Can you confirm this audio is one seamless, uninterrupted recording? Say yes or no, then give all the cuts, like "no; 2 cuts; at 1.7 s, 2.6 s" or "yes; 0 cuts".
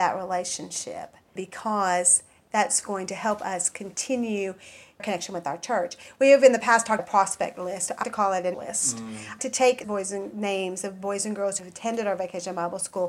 no; 9 cuts; at 1.4 s, 2.8 s, 5.0 s, 7.0 s, 8.0 s, 8.5 s, 9.4 s, 9.8 s, 11.6 s